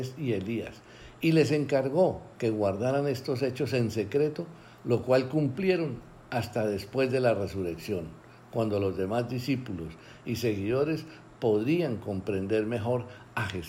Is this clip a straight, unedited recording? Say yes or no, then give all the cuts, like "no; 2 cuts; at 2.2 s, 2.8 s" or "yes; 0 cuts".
no; 1 cut; at 2.3 s